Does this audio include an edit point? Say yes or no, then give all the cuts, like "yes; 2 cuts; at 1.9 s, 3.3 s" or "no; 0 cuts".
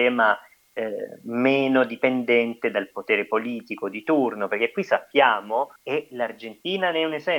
yes; 1 cut; at 5.8 s